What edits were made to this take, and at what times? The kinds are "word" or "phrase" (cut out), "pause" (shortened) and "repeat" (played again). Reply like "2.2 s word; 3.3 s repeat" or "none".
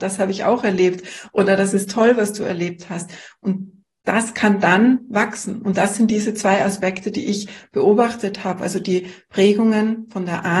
none